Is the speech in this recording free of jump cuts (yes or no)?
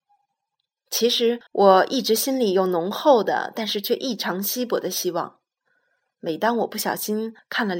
no